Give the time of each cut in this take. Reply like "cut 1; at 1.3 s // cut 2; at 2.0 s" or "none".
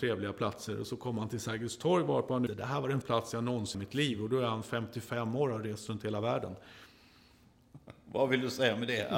cut 1; at 2.5 s // cut 2; at 3.0 s // cut 3; at 3.7 s